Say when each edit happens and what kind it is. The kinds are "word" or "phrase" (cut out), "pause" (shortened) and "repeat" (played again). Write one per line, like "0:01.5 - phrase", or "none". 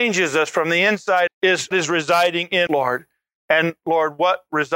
0:01.3 - word
0:01.7 - word
0:02.7 - word